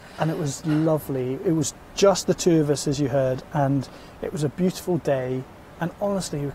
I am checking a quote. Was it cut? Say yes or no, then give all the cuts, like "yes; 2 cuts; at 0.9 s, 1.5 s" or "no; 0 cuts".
no; 0 cuts